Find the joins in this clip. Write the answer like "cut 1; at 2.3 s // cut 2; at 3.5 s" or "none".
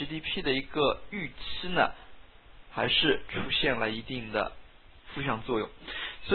cut 1; at 4.8 s